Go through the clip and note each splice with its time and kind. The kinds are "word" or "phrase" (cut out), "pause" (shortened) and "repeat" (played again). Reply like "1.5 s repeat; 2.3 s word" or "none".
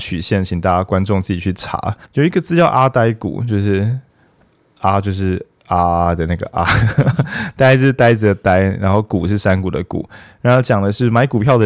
2.0 s pause; 4.1 s pause